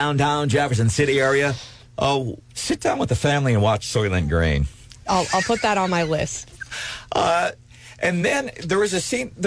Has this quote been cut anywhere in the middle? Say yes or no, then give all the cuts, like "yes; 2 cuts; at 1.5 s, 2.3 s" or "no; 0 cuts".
no; 0 cuts